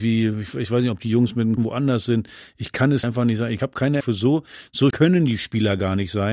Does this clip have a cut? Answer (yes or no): yes